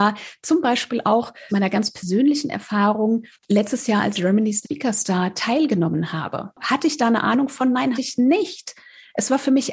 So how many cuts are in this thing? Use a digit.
5